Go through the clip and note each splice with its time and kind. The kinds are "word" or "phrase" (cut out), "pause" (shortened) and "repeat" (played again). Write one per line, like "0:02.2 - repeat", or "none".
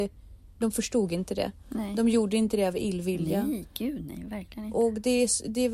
none